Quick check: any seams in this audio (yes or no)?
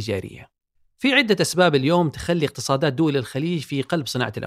no